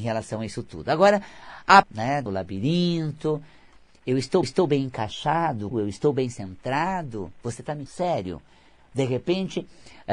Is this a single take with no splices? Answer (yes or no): no